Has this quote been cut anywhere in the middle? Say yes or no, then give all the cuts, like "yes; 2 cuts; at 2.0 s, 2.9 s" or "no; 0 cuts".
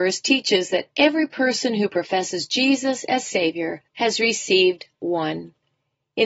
yes; 1 cut; at 3.9 s